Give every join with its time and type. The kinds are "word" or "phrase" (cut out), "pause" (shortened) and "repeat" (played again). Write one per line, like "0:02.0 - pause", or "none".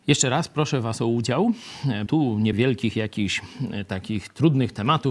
0:02.1 - word
0:02.5 - word